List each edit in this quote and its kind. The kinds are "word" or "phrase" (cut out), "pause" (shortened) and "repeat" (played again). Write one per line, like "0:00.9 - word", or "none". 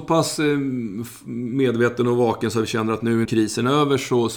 0:03.2 - word